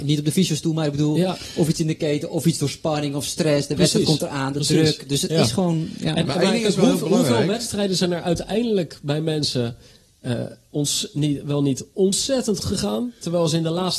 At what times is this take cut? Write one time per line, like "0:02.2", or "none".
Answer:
0:12.6